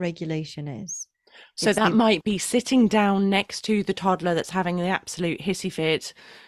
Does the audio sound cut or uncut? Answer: uncut